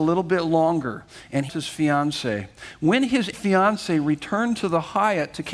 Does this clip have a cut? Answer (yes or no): yes